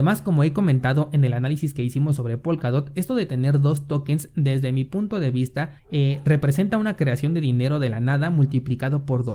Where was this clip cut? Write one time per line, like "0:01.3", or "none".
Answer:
0:05.8